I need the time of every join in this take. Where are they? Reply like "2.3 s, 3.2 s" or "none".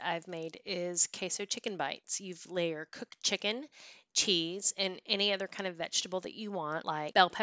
none